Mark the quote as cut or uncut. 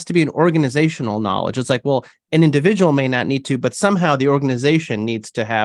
uncut